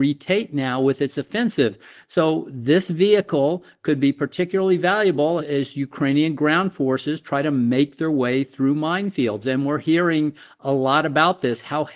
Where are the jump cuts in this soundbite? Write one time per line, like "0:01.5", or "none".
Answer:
0:05.4